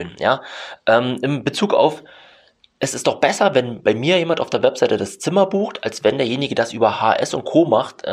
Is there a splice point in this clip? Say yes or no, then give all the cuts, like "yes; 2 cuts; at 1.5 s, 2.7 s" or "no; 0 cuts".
no; 0 cuts